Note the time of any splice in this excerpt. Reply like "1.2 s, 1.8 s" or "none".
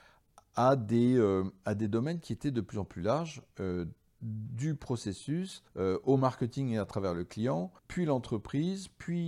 5.7 s, 7.8 s